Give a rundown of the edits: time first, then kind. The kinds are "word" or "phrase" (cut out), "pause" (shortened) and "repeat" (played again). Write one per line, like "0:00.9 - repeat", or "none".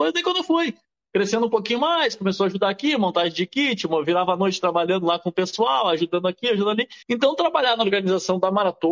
0:07.0 - pause